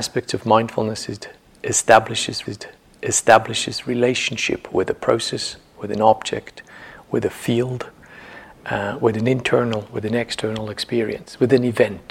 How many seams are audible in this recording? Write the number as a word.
one